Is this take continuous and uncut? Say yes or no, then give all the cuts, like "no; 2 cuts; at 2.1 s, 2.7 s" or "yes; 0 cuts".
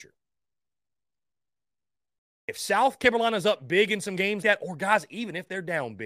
no; 1 cut; at 4.4 s